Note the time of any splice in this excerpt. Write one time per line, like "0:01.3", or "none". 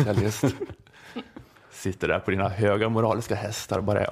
0:01.6